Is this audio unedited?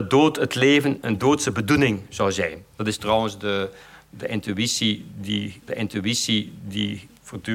no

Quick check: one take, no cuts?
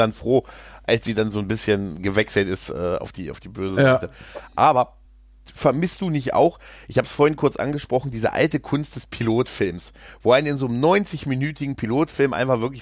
yes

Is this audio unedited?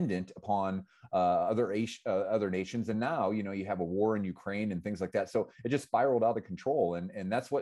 yes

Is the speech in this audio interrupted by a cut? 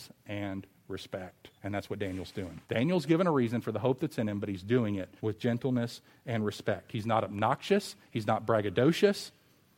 yes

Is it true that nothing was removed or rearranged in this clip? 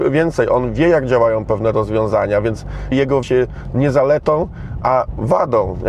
no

